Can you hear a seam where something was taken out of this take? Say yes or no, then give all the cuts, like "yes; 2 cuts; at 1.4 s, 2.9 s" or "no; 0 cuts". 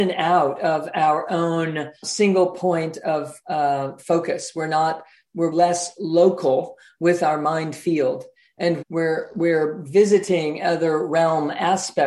yes; 4 cuts; at 2.0 s, 4.0 s, 5.5 s, 8.8 s